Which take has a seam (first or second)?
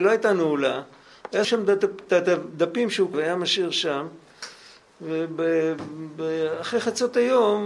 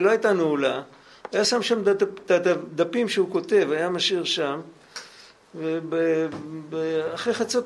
first